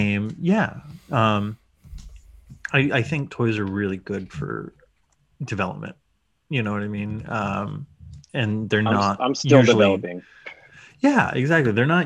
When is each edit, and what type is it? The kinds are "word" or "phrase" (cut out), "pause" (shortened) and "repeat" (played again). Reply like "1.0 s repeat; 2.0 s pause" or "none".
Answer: none